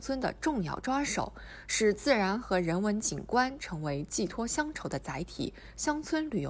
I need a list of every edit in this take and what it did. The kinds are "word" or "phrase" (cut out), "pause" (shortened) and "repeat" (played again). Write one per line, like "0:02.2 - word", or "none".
none